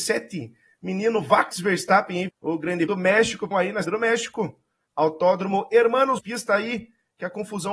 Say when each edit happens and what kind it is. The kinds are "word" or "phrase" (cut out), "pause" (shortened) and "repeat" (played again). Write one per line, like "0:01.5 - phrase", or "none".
0:01.5 - word
0:02.3 - word
0:02.9 - word
0:03.5 - word
0:03.8 - word
0:06.2 - word